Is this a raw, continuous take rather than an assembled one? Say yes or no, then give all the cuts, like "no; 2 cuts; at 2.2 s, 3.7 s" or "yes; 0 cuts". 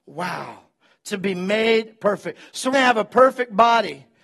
no; 1 cut; at 2.7 s